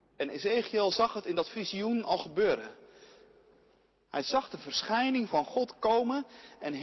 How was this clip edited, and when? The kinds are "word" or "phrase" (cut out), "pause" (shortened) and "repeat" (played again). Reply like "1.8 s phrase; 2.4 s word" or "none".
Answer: none